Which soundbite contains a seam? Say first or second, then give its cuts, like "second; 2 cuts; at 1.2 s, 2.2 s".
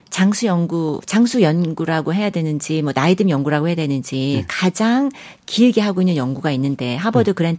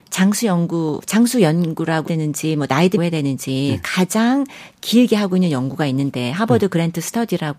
second; 2 cuts; at 2.1 s, 3.0 s